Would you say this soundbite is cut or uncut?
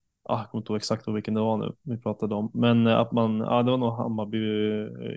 uncut